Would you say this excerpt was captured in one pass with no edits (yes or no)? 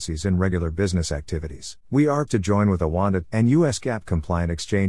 no